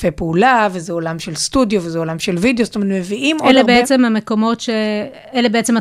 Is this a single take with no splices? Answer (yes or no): yes